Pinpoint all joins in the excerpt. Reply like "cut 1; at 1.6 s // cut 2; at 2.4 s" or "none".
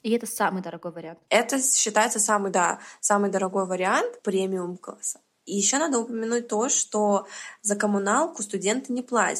none